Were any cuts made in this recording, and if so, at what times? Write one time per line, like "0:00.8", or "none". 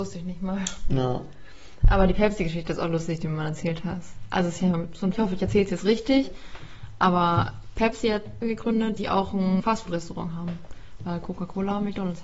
0:05.1
0:08.4
0:09.0
0:09.6